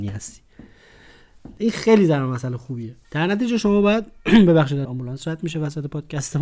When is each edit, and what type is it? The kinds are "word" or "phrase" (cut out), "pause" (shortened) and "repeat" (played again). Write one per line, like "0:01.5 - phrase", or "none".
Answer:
0:03.0 - pause
0:04.8 - phrase